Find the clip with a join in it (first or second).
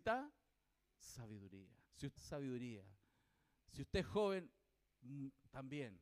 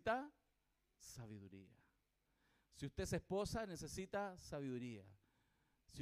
first